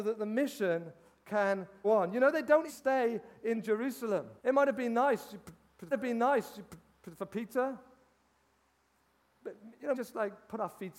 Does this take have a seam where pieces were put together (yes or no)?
yes